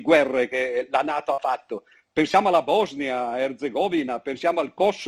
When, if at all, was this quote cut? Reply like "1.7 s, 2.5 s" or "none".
none